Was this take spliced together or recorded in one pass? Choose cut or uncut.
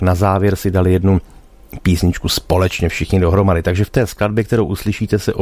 uncut